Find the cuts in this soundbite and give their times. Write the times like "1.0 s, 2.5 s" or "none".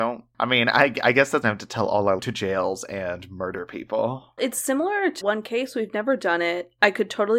1.4 s, 2.2 s, 4.4 s, 5.2 s

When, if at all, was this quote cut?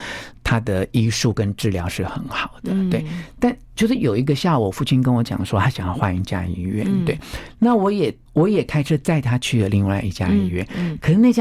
8.2 s

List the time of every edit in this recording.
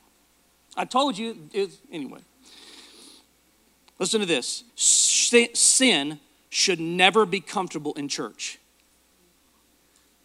1.8 s, 4.7 s

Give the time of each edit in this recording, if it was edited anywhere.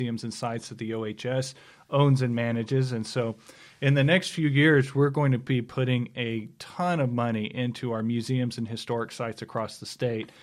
none

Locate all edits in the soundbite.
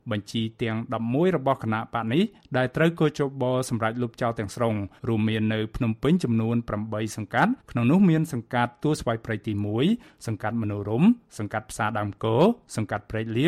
5.0 s, 7.6 s

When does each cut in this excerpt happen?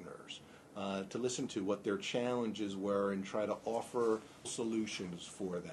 1.5 s, 4.4 s

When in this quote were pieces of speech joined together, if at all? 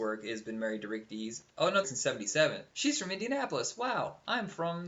1.8 s, 2.7 s

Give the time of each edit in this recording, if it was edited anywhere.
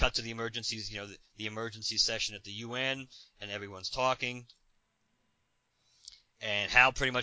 none

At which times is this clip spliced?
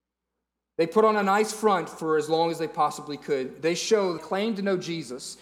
4.2 s

